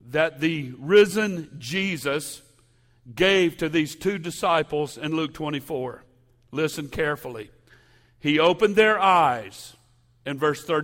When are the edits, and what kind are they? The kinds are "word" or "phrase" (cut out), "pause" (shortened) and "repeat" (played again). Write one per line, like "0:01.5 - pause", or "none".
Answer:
none